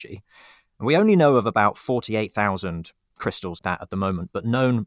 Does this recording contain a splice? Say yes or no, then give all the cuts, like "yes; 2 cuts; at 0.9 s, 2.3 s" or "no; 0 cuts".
yes; 1 cut; at 3.6 s